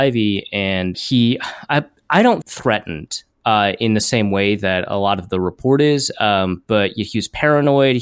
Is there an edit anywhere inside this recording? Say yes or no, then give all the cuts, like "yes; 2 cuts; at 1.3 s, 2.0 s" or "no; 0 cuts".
yes; 2 cuts; at 0.9 s, 2.4 s